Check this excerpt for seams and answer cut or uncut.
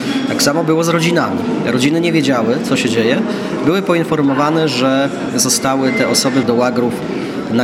cut